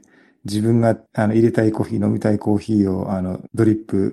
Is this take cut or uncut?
cut